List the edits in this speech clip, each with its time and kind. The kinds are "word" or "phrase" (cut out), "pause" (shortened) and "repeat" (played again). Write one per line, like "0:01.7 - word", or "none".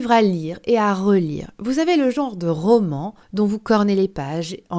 0:03.2 - pause